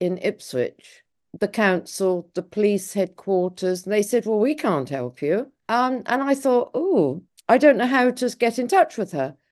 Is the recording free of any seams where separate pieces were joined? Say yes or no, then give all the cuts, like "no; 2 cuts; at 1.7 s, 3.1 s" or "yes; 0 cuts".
no; 1 cut; at 5.6 s